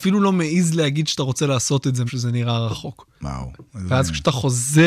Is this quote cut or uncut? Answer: cut